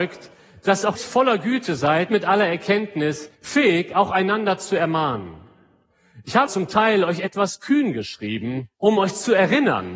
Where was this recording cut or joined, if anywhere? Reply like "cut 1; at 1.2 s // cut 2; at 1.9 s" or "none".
cut 1; at 1.0 s // cut 2; at 2.1 s // cut 3; at 3.3 s // cut 4; at 6.5 s // cut 5; at 8.7 s